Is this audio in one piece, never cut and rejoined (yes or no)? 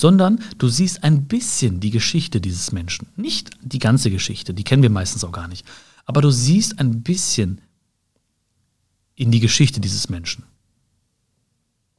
yes